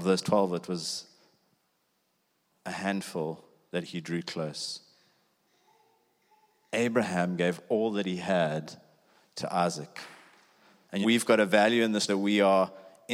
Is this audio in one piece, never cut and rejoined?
no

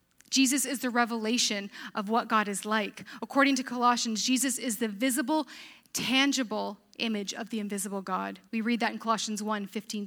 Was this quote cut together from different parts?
yes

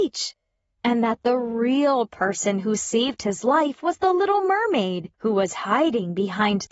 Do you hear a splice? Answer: yes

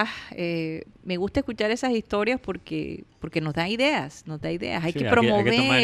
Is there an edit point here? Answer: yes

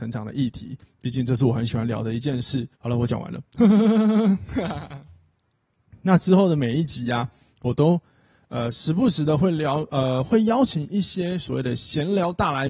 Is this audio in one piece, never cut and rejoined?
no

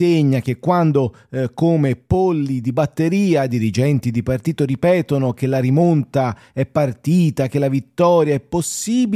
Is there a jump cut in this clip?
no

